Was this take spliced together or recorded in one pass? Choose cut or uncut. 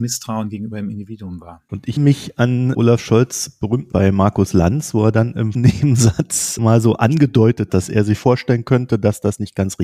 cut